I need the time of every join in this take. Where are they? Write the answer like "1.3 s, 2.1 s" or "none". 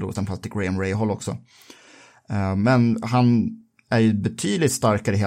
none